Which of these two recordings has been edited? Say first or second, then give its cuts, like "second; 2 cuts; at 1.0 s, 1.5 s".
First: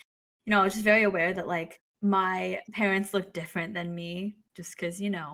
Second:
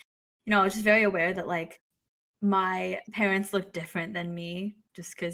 first; 1 cut; at 1.8 s